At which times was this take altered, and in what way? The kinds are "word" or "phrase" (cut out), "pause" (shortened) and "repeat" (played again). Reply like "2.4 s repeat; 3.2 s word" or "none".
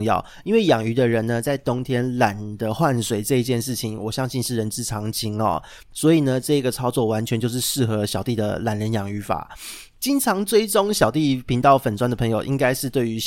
5.8 s pause